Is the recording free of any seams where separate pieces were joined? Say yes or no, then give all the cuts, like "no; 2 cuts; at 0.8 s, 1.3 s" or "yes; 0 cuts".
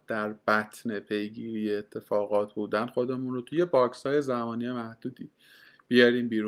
yes; 0 cuts